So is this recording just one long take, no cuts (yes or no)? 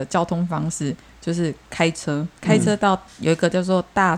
no